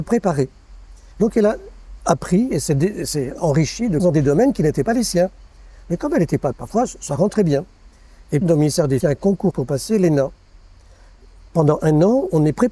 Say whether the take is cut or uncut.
cut